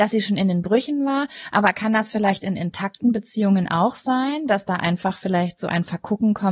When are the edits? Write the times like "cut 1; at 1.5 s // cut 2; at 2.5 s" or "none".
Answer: none